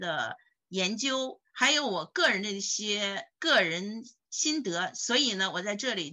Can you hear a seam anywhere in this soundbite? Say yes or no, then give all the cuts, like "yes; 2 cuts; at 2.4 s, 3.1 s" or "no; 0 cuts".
yes; 2 cuts; at 1.5 s, 3.3 s